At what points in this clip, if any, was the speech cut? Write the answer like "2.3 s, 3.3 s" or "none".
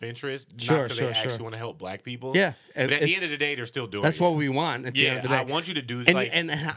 none